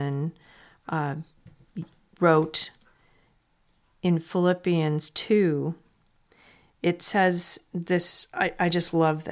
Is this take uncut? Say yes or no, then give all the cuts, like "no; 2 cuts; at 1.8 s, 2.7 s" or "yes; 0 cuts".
yes; 0 cuts